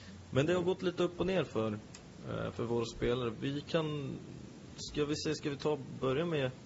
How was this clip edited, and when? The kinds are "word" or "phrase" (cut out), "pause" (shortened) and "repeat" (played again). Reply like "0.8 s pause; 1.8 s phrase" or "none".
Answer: none